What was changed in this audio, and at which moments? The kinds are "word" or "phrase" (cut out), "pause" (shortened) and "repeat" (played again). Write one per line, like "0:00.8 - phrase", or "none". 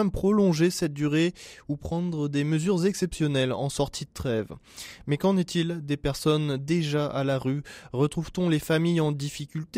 none